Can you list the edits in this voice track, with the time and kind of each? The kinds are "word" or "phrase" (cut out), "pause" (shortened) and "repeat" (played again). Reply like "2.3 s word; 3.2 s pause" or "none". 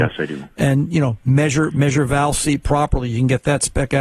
none